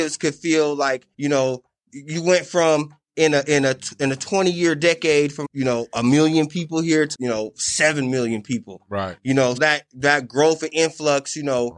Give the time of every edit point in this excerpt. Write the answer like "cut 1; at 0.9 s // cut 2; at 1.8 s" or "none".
cut 1; at 1.1 s // cut 2; at 5.4 s // cut 3; at 7.1 s // cut 4; at 9.6 s